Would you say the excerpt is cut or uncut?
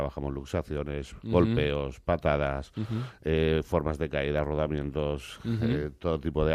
uncut